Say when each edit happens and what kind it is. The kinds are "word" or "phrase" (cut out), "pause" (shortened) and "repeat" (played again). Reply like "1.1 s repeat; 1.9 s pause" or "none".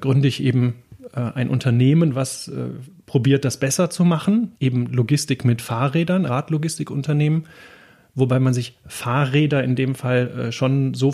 4.5 s pause; 6.3 s word